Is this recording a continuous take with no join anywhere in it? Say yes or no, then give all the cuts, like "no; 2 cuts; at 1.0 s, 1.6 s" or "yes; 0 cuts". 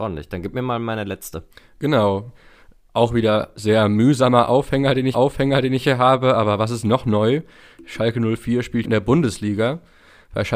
no; 3 cuts; at 1.5 s, 5.1 s, 8.8 s